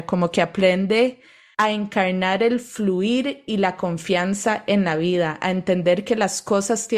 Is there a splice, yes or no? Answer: no